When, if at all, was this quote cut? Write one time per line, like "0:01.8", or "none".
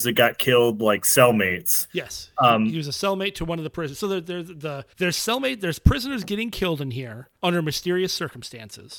0:01.9
0:04.9
0:07.4